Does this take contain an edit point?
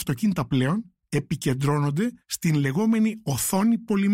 yes; 1 cut; at 2.2 s

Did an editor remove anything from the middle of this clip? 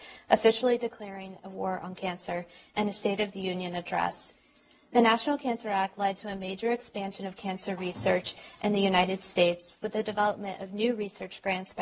no; 0 cuts

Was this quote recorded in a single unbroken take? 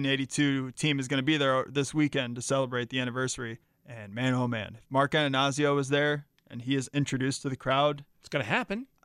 no; 2 cuts; at 3.6 s, 8.1 s

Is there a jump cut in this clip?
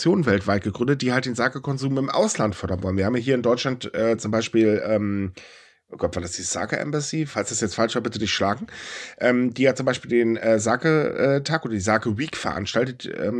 no; 0 cuts

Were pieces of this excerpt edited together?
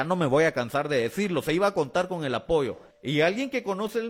yes; 1 cut; at 2.9 s

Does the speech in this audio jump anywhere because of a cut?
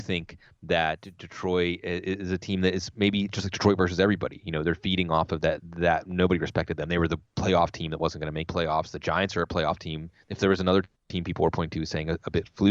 yes; 1 cut; at 8.5 s

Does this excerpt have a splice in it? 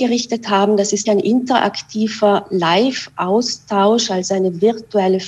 yes; 1 cut; at 1.1 s

